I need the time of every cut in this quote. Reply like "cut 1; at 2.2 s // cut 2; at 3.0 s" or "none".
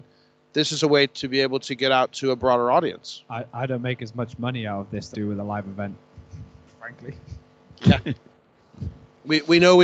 cut 1; at 5.1 s